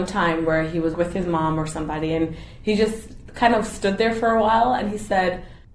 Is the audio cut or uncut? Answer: uncut